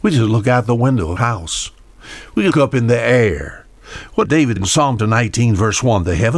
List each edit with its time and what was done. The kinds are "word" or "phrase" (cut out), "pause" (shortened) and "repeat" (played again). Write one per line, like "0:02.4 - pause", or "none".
0:01.2 - word
0:02.5 - word
0:04.2 - word
0:04.6 - word
0:05.0 - word